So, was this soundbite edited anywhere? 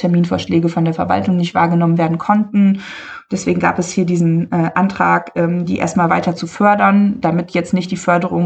no; 0 cuts

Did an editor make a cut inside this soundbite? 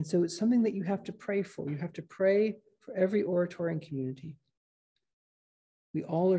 no; 0 cuts

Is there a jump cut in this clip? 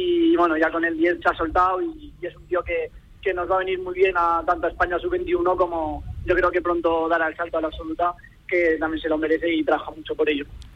yes; 1 cut; at 1.2 s

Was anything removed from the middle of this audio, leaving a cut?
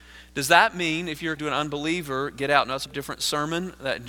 yes; 2 cuts; at 1.4 s, 2.9 s

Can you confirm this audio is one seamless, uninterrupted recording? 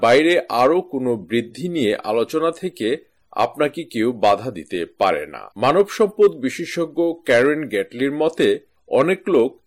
no; 1 cut; at 5.5 s

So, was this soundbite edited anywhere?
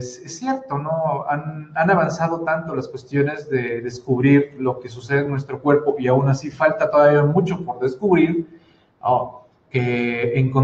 no; 0 cuts

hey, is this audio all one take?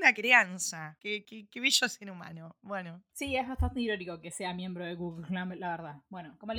yes; 0 cuts

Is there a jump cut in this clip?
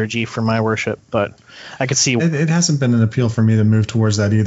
yes; 1 cut; at 2.2 s

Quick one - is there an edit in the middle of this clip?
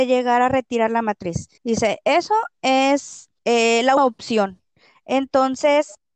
yes; 3 cuts; at 1.6 s, 3.4 s, 4.0 s

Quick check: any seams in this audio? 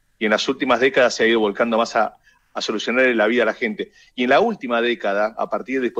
no; 0 cuts

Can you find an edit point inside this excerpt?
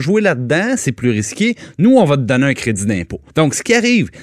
yes; 1 cut; at 3.3 s

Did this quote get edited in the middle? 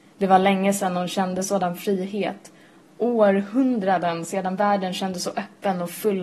no; 0 cuts

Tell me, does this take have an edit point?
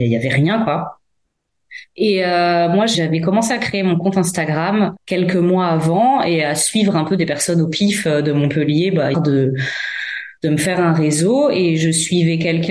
yes; 4 cuts; at 1.9 s, 2.9 s, 5.0 s, 9.1 s

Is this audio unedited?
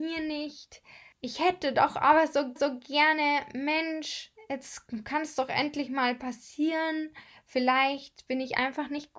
no; 1 cut; at 2.6 s

